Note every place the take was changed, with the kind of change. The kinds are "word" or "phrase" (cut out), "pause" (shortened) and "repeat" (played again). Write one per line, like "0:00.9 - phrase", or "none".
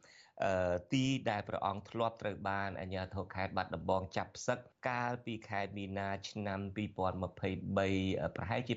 0:04.7 - pause